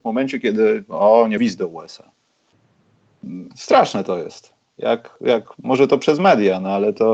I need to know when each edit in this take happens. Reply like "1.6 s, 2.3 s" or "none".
1.4 s, 3.5 s